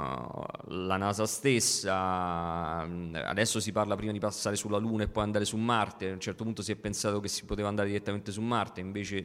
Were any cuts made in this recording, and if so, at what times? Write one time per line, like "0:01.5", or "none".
none